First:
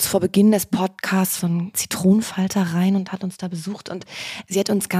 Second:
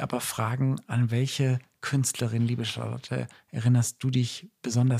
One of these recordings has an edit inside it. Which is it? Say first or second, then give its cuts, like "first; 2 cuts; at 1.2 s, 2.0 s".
first; 2 cuts; at 1.4 s, 1.7 s